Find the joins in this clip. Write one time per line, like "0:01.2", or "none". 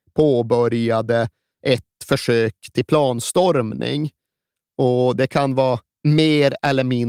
none